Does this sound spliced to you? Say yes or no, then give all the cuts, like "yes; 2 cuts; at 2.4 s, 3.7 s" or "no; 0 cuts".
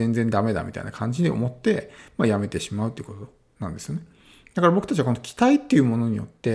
no; 0 cuts